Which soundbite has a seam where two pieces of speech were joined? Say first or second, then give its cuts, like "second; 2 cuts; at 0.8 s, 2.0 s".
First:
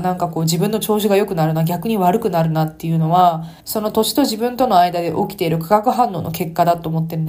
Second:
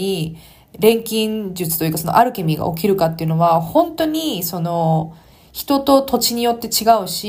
first; 1 cut; at 3.6 s